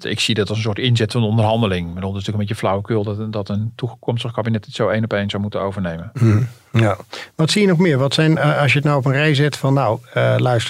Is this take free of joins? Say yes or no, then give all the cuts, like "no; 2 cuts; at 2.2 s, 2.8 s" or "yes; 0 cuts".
yes; 0 cuts